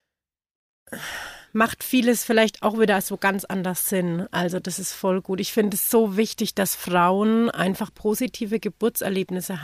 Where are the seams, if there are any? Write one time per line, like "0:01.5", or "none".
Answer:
0:07.9